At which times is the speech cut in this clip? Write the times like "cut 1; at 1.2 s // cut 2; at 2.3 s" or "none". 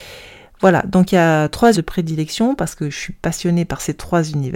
cut 1; at 1.7 s

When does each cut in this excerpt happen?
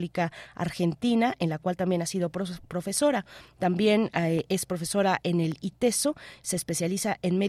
none

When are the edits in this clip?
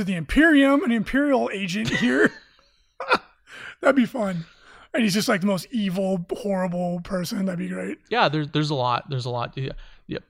none

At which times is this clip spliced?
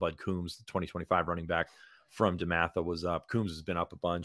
none

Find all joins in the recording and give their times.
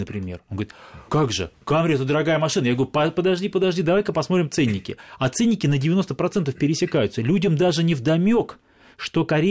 cut 1; at 1.1 s

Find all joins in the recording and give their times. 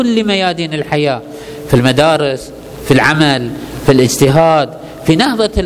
none

